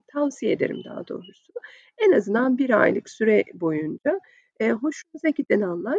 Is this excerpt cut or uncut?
uncut